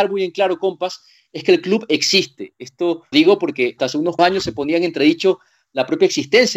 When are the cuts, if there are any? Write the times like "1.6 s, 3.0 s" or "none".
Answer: 3.1 s, 3.8 s, 4.2 s